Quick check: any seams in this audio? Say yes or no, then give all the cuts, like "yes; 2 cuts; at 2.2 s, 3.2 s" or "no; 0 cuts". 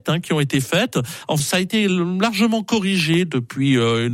yes; 1 cut; at 1.4 s